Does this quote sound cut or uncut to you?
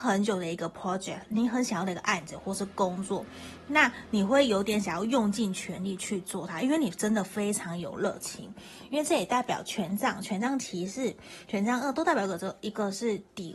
uncut